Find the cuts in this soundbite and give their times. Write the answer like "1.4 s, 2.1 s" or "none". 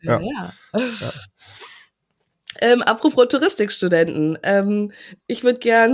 none